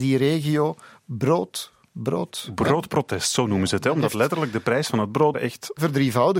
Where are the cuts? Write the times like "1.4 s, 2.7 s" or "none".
5.3 s